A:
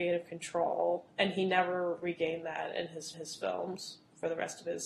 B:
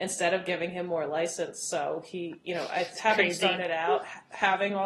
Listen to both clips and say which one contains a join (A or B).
A